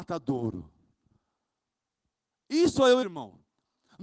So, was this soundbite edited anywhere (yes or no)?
yes